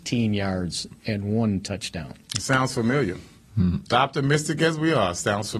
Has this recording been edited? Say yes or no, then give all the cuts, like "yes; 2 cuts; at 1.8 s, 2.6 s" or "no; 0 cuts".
yes; 1 cut; at 3.9 s